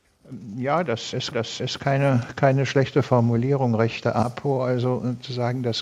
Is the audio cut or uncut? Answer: cut